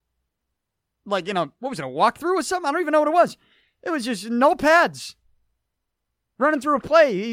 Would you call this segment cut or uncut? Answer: uncut